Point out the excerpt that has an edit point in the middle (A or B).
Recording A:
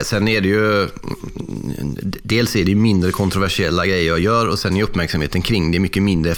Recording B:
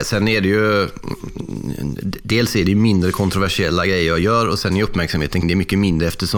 B